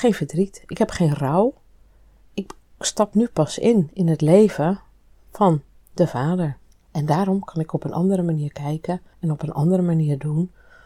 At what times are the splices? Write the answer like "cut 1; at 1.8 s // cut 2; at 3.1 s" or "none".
none